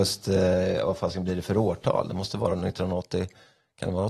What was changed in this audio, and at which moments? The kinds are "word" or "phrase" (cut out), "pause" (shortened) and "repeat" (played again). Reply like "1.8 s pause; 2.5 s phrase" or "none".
none